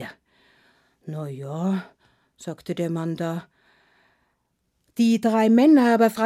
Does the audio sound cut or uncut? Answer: uncut